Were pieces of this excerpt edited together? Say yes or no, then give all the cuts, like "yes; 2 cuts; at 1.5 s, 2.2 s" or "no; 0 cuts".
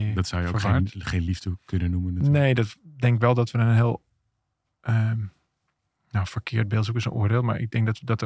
no; 0 cuts